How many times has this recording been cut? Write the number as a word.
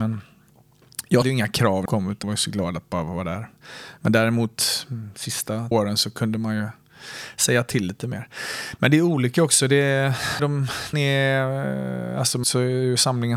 seven